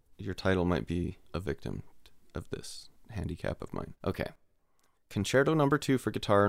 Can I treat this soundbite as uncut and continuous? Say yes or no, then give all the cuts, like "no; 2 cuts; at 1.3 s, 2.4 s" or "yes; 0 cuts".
no; 3 cuts; at 1.3 s, 3.0 s, 4.0 s